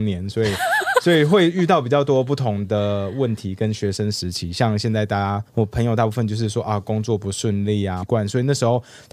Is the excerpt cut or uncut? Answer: cut